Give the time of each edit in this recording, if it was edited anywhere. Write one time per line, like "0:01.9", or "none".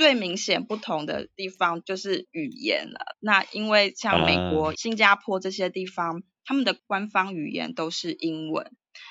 0:04.7

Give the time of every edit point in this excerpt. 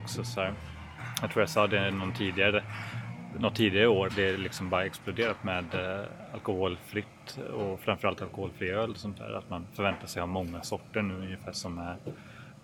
0:04.1

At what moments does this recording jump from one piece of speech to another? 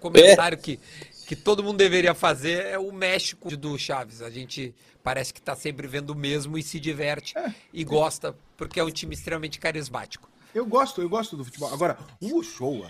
0:03.5

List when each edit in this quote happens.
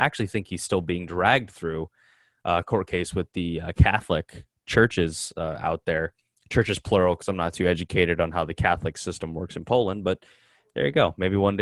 none

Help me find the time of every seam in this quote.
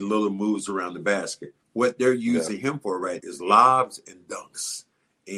0:01.6
0:03.2

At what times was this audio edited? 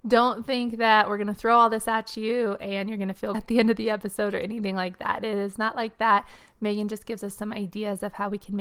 0:03.3

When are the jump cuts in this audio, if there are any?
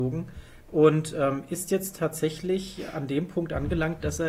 none

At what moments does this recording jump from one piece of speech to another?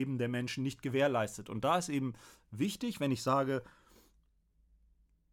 none

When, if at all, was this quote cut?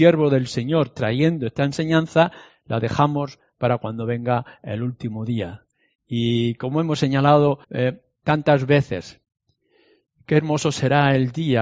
0:07.6

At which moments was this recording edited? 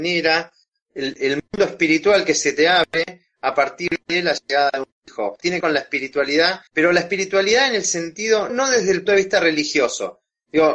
0:05.6
0:06.7
0:08.5
0:09.1

